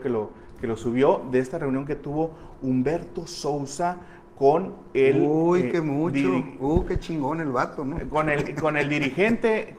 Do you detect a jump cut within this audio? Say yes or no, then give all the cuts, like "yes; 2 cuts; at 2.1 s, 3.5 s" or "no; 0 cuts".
no; 0 cuts